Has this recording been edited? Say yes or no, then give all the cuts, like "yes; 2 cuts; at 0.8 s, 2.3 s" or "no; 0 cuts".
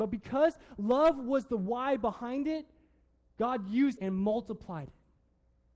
yes; 1 cut; at 4.0 s